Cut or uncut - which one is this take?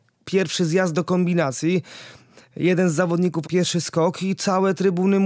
cut